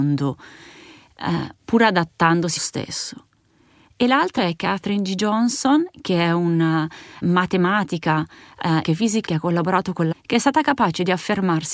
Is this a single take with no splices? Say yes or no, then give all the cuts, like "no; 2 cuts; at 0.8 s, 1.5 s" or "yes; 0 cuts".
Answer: no; 6 cuts; at 2.6 s, 4.4 s, 7.2 s, 8.8 s, 9.3 s, 10.1 s